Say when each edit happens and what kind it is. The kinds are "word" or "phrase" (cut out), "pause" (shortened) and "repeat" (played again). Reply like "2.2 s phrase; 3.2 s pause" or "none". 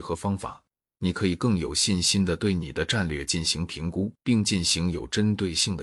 4.2 s pause